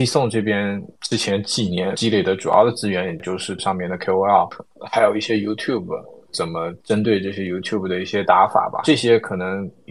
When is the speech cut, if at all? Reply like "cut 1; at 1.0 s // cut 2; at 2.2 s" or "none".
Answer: cut 1; at 0.9 s // cut 2; at 3.6 s // cut 3; at 6.8 s